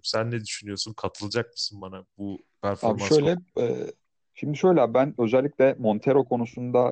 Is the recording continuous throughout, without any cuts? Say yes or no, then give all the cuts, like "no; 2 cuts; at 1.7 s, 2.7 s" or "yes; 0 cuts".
yes; 0 cuts